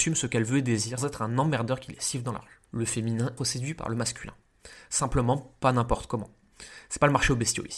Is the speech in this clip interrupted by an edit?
yes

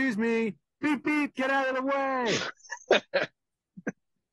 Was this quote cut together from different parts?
no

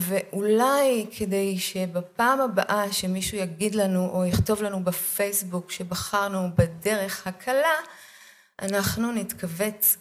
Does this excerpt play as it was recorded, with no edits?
yes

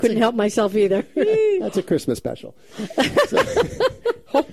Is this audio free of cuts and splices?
yes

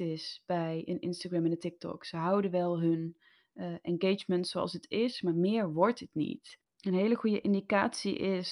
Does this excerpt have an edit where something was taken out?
no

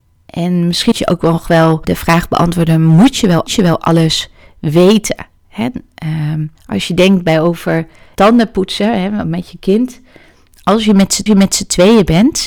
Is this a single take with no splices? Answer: no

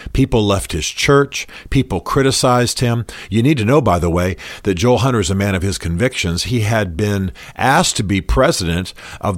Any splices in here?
no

